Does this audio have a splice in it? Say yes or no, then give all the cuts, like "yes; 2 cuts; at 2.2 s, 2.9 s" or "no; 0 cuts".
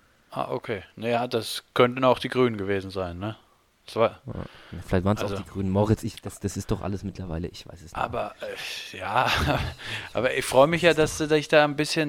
no; 0 cuts